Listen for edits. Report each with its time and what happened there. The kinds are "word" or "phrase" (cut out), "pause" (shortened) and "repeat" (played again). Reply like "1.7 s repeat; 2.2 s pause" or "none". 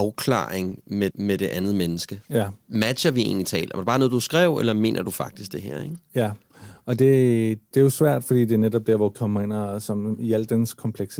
1.1 s repeat; 2.2 s pause; 7.7 s word; 9.1 s word

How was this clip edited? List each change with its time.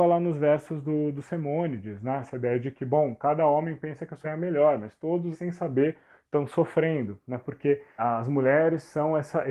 4.2 s word; 5.3 s word; 8.0 s word

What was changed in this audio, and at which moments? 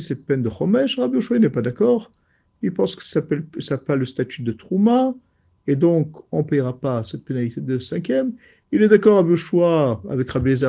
none

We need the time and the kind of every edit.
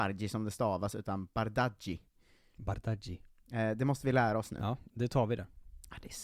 none

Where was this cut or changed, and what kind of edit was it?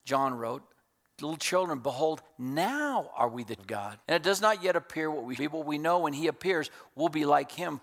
1.0 s pause; 3.6 s word; 4.0 s pause; 5.3 s word

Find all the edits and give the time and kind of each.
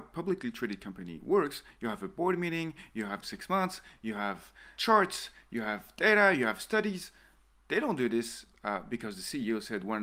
3.2 s phrase; 4.7 s word

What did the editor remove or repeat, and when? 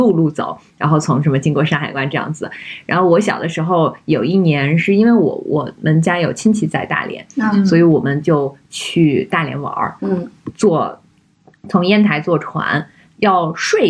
none

